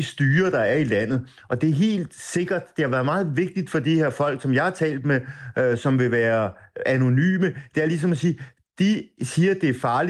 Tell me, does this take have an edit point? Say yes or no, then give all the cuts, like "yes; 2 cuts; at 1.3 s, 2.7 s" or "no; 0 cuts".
no; 0 cuts